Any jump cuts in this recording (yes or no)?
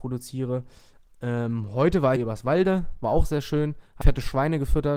yes